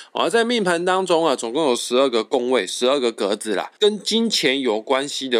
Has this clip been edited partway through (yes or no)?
yes